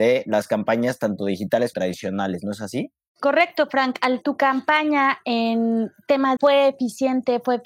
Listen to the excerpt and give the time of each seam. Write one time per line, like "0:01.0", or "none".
0:01.7
0:04.2
0:06.4